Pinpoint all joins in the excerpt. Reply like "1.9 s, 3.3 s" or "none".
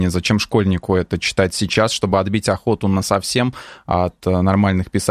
none